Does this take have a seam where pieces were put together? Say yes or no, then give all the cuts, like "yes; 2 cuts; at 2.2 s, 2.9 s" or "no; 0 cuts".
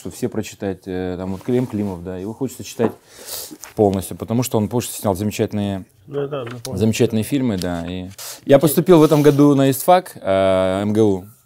yes; 1 cut; at 3.7 s